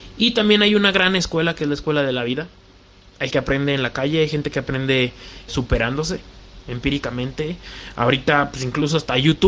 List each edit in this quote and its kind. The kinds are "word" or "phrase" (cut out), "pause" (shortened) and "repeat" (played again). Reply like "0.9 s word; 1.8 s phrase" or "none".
3.3 s word; 5.5 s word